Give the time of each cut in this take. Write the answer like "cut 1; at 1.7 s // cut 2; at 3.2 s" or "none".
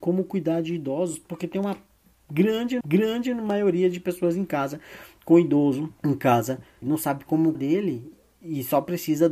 cut 1; at 2.8 s // cut 2; at 6.0 s // cut 3; at 6.8 s // cut 4; at 7.5 s